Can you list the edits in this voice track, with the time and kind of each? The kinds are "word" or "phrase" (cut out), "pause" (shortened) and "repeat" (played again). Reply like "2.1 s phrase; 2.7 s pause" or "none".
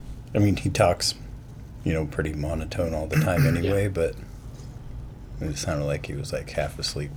none